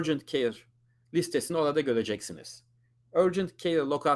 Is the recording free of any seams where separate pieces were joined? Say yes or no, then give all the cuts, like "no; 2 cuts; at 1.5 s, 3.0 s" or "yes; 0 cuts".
yes; 0 cuts